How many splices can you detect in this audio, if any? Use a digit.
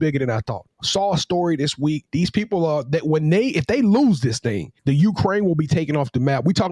2